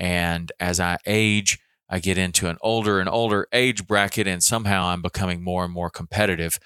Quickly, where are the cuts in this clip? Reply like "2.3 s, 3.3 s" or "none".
none